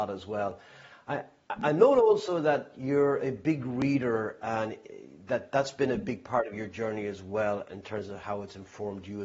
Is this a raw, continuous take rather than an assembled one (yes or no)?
yes